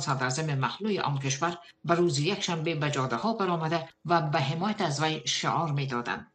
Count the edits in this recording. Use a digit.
0